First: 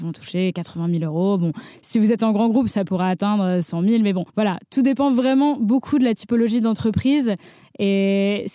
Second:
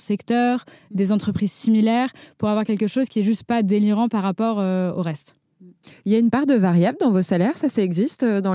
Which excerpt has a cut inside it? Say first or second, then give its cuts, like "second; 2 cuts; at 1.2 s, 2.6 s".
first; 1 cut; at 4.3 s